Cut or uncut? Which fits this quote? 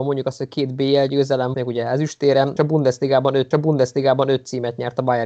cut